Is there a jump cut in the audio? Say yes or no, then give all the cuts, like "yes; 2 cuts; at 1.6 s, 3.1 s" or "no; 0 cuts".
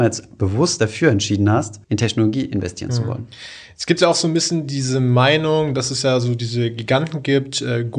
yes; 1 cut; at 1.8 s